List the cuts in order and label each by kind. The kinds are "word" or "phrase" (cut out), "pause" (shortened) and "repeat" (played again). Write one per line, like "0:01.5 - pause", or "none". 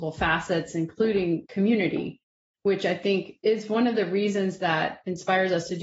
none